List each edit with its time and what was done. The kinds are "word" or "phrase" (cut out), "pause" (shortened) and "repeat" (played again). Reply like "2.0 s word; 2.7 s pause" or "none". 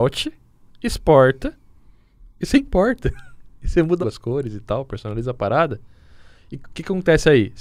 2.3 s pause; 4.0 s word